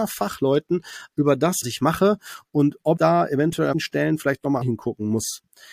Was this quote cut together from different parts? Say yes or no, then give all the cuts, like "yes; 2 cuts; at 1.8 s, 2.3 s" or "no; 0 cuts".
yes; 5 cuts; at 1.1 s, 1.6 s, 3.0 s, 3.7 s, 4.6 s